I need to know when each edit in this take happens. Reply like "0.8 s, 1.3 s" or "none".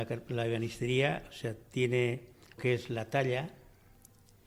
2.6 s